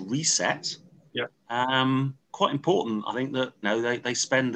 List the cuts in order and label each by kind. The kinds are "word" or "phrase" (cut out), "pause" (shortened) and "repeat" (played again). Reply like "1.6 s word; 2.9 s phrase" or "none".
2.2 s pause; 3.6 s word

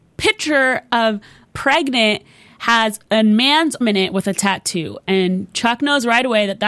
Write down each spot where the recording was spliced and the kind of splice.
1.4 s word; 3.8 s word

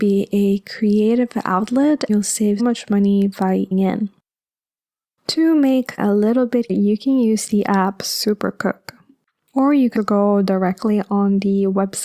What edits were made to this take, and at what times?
2.1 s word; 2.6 s word; 3.7 s word; 6.0 s word; 6.7 s word; 10.0 s word

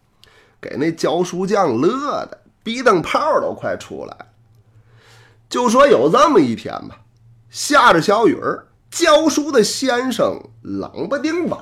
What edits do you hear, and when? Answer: 8.7 s pause

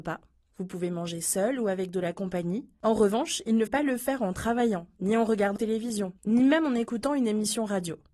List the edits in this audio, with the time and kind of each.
3.7 s word; 5.6 s word

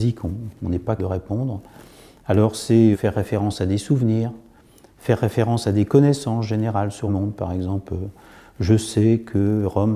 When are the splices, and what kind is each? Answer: 1.0 s word; 2.9 s word; 7.1 s word

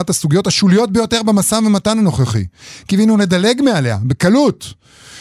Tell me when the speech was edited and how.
none

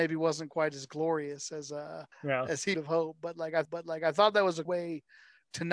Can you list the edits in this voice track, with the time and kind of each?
2.1 s pause; 2.7 s word; 3.6 s repeat; 4.6 s word

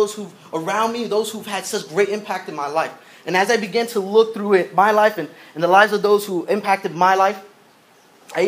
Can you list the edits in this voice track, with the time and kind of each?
none

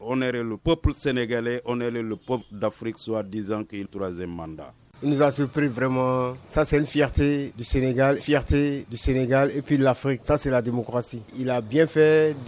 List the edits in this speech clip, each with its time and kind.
3.9 s phrase; 8.2 s repeat

